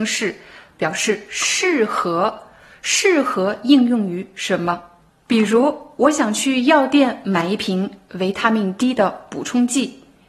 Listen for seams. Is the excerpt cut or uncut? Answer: uncut